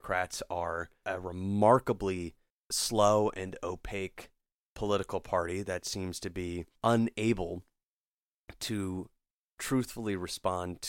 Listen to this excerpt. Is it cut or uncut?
cut